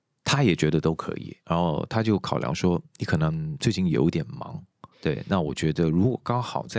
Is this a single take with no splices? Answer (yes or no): no